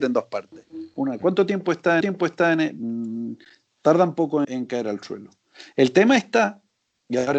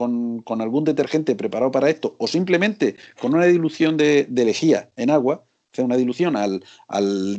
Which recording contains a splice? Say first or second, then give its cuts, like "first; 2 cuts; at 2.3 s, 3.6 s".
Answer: first; 2 cuts; at 2.0 s, 4.4 s